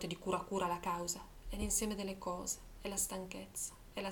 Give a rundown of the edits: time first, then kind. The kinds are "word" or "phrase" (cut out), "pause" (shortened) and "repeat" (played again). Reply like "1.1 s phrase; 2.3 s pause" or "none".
none